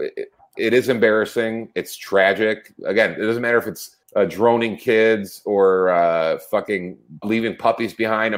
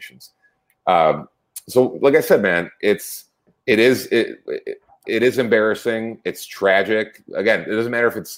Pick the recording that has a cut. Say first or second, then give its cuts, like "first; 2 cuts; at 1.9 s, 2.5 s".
first; 2 cuts; at 4.0 s, 7.2 s